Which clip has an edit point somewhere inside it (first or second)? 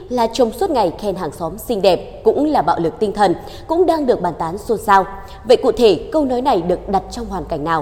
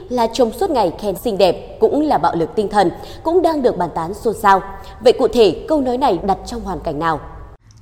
second